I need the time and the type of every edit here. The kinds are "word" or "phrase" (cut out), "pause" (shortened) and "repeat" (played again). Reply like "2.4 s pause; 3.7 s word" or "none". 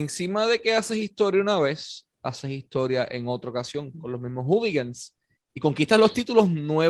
none